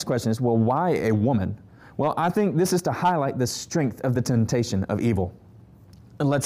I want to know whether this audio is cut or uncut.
uncut